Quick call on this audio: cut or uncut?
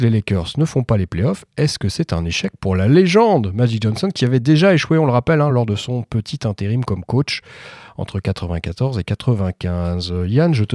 uncut